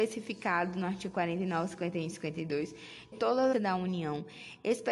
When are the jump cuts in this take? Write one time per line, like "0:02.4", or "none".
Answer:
0:03.1
0:03.5

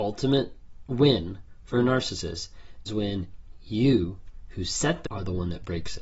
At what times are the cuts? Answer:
0:02.9
0:05.0

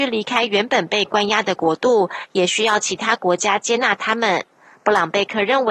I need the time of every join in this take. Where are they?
none

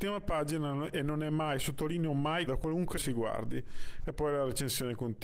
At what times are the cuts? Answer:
0:02.5
0:03.0

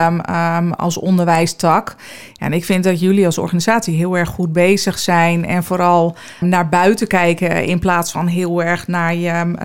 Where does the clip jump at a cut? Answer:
0:06.4

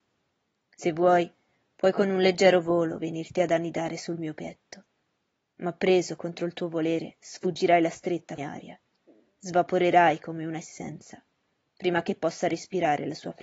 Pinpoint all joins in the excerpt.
0:08.4

